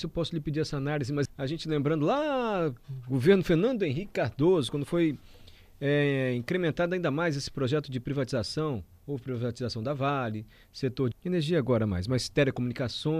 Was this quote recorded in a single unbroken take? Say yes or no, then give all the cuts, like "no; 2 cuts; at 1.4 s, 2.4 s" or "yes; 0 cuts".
no; 2 cuts; at 1.3 s, 11.1 s